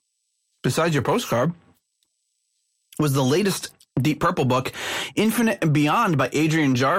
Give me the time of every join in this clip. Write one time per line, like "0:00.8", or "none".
none